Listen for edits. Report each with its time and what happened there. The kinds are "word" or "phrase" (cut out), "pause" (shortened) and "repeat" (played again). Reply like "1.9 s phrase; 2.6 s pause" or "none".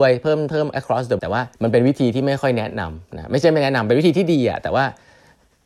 1.2 s word; 1.5 s pause